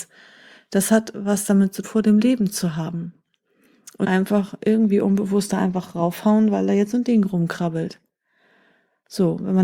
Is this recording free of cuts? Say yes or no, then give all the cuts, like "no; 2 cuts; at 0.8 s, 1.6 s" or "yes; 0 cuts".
no; 2 cuts; at 1.8 s, 4.0 s